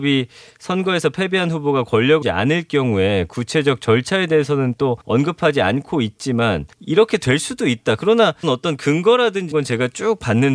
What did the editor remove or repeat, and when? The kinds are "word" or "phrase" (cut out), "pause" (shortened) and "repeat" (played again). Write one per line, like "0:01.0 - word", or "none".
0:02.2 - word
0:05.0 - pause
0:06.7 - pause
0:08.4 - word
0:09.5 - word